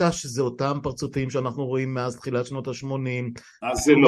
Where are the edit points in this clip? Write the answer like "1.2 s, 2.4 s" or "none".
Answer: none